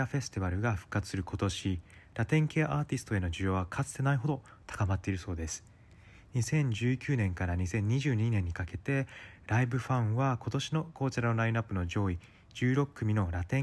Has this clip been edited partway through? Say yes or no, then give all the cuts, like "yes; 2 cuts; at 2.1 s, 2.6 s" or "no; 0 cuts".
no; 0 cuts